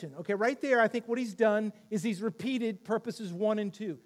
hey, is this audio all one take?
yes; 0 cuts

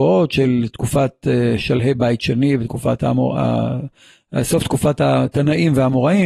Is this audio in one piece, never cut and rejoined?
yes; 0 cuts

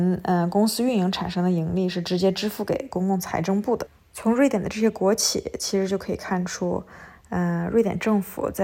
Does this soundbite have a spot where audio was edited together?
no; 0 cuts

